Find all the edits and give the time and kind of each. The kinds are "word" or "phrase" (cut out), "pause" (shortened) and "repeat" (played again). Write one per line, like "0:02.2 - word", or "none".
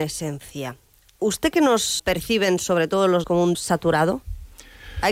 0:01.5 - word
0:02.0 - word
0:03.2 - word
0:03.5 - word